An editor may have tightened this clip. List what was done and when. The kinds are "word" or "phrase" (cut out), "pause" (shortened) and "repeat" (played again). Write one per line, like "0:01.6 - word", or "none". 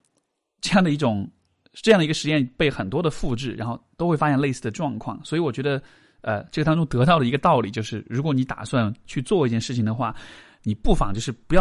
none